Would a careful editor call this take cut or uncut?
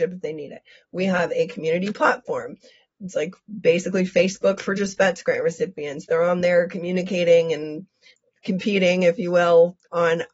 uncut